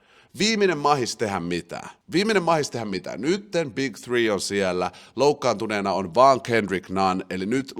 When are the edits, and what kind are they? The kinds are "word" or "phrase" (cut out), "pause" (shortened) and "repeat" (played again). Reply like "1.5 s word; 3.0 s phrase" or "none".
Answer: 2.0 s pause